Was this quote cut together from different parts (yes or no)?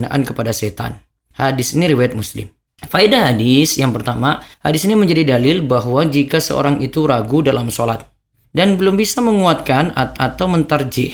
yes